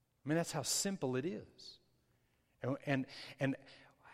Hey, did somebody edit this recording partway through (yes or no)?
no